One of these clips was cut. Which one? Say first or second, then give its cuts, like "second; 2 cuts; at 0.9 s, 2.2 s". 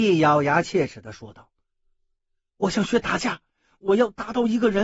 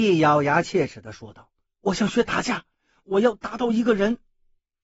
second; 1 cut; at 1.7 s